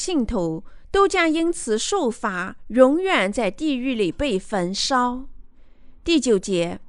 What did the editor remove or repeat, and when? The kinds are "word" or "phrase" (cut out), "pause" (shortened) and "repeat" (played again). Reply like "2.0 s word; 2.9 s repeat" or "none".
none